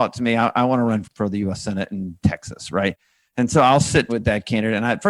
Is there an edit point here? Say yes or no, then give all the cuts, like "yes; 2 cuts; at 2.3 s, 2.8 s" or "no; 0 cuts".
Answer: yes; 2 cuts; at 1.0 s, 4.1 s